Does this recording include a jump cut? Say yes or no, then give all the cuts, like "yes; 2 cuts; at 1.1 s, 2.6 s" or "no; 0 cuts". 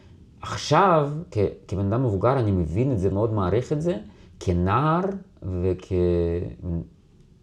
yes; 1 cut; at 3.1 s